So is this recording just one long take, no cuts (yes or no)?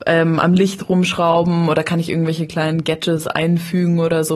yes